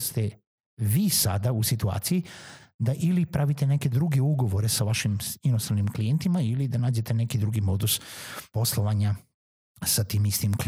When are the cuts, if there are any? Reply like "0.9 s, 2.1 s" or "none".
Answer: 8.5 s